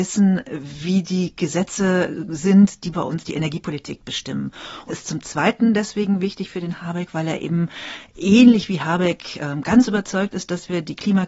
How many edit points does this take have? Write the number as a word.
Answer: one